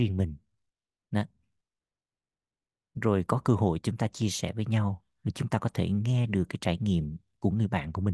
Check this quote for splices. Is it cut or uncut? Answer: uncut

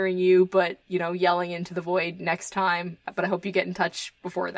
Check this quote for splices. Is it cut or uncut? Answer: uncut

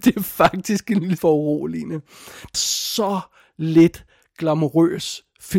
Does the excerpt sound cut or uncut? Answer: cut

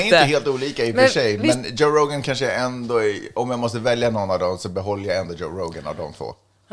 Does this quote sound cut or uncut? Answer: uncut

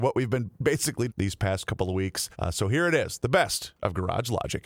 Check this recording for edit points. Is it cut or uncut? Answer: cut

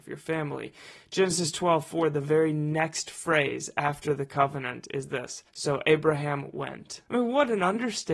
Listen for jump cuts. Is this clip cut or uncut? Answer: cut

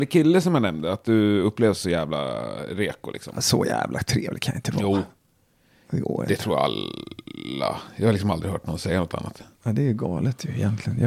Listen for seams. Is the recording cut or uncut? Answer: cut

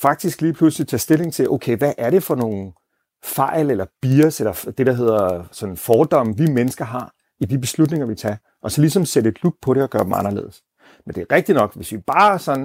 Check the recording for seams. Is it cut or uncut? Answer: uncut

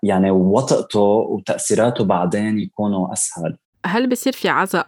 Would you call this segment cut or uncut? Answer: uncut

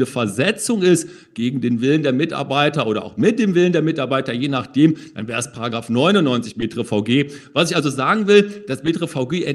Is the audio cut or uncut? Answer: uncut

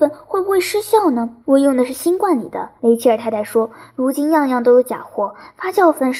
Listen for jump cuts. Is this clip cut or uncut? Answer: cut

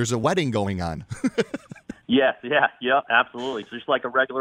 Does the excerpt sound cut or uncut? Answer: uncut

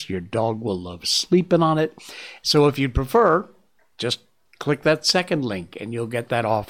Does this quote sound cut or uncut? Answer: uncut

